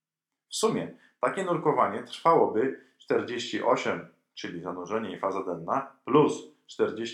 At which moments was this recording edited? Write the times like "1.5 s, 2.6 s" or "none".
none